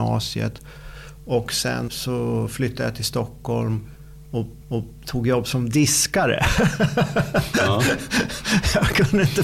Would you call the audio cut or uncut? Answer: cut